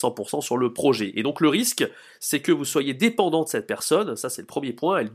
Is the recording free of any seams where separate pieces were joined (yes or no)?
yes